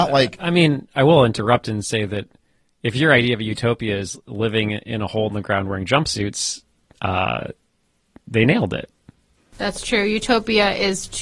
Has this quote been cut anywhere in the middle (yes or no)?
no